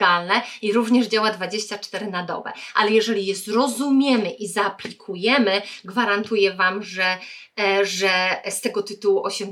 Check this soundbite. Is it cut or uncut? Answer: uncut